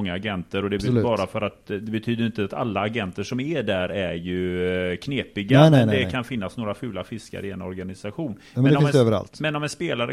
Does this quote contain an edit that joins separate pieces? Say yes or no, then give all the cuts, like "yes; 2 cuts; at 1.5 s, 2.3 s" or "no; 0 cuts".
no; 0 cuts